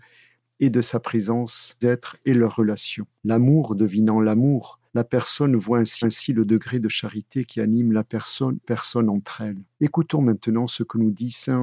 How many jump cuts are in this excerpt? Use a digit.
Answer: 6